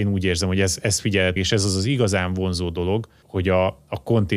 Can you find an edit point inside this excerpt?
yes; 2 cuts; at 1.4 s, 3.2 s

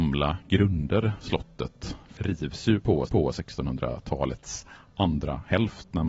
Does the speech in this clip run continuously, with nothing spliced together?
no; 3 cuts; at 1.2 s, 2.2 s, 3.1 s

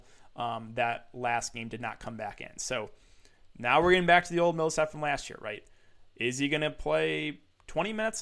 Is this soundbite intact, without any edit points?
yes; 0 cuts

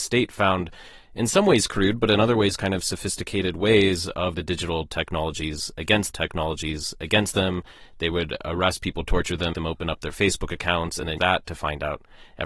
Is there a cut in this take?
yes; 4 cuts; at 4.3 s, 6.1 s, 9.5 s, 11.2 s

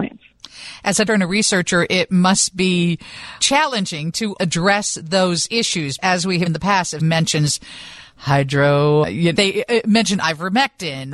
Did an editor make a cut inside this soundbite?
yes; 8 cuts; at 1.1 s, 3.4 s, 4.4 s, 6.0 s, 6.5 s, 7.0 s, 9.0 s, 9.3 s

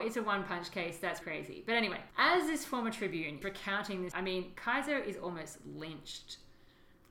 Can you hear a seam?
yes; 4 cuts; at 1.2 s, 2.1 s, 3.4 s, 4.1 s

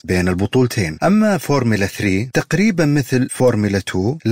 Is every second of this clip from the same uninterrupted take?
yes; 0 cuts

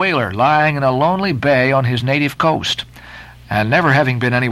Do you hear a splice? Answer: no; 0 cuts

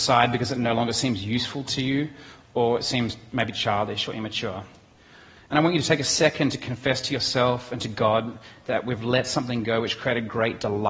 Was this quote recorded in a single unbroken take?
yes; 0 cuts

